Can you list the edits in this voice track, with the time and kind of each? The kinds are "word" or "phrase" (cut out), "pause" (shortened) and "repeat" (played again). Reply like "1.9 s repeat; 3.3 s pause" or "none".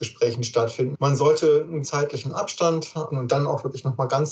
0.9 s word; 1.8 s word; 3.1 s word